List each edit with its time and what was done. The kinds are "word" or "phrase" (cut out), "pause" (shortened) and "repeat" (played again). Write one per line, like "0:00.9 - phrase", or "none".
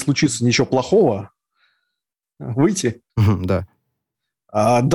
0:03.1 - pause